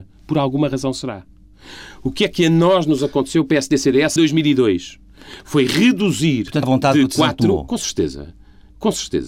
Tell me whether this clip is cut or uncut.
cut